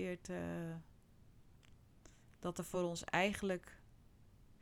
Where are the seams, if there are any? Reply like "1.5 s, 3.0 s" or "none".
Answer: none